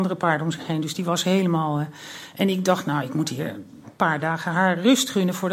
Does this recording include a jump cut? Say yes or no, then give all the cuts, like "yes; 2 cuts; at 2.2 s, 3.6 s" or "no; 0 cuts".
no; 0 cuts